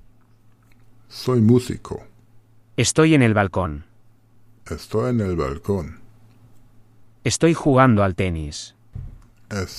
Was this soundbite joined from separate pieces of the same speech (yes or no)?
no